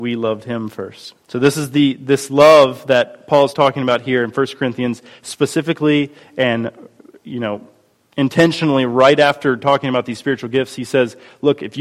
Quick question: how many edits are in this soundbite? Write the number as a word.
one